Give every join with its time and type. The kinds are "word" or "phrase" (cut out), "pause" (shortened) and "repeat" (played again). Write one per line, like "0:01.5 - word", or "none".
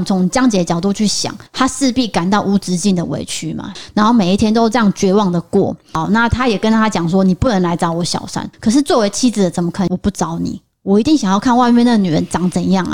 0:01.5 - pause
0:08.5 - pause